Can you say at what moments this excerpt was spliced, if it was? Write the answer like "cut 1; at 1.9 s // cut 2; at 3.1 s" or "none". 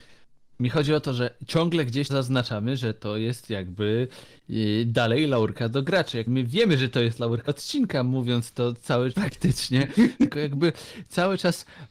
cut 1; at 2.1 s // cut 2; at 6.3 s // cut 3; at 7.5 s // cut 4; at 9.1 s